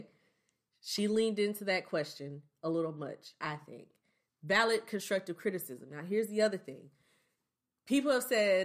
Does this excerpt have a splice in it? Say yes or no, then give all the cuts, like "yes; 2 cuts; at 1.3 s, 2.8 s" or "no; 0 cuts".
no; 0 cuts